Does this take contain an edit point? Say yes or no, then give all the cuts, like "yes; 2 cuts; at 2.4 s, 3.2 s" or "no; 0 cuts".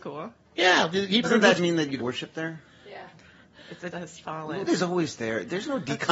yes; 5 cuts; at 1.2 s, 1.6 s, 2.0 s, 3.9 s, 4.7 s